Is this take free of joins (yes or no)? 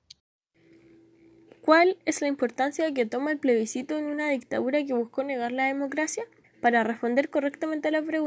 no